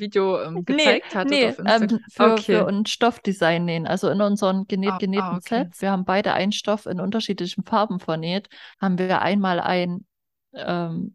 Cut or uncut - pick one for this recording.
cut